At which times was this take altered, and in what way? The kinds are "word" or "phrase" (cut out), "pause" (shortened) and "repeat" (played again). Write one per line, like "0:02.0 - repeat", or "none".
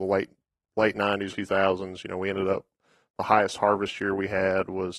0:01.3 - word